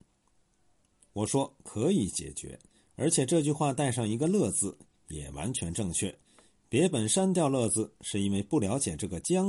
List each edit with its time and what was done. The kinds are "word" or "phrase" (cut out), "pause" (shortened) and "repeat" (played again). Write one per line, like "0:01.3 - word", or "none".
none